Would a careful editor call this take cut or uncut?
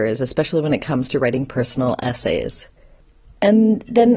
uncut